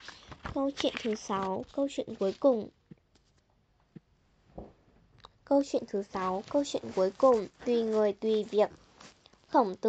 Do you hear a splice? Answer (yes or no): yes